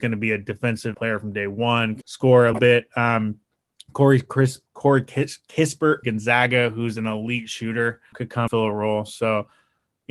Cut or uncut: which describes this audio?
cut